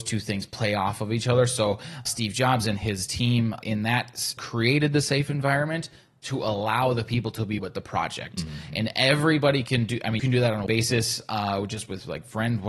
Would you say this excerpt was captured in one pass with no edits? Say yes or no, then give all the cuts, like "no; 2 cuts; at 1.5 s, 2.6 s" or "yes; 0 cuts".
no; 6 cuts; at 2.1 s, 3.6 s, 4.4 s, 7.6 s, 10.2 s, 10.7 s